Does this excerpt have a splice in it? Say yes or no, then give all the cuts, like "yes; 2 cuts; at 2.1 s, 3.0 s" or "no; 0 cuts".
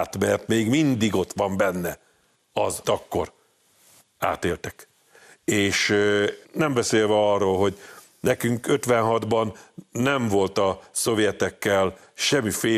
yes; 2 cuts; at 2.8 s, 6.4 s